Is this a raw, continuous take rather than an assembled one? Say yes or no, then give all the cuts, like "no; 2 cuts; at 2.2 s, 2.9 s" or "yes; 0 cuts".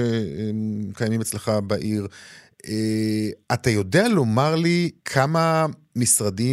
no; 2 cuts; at 3.4 s, 5.0 s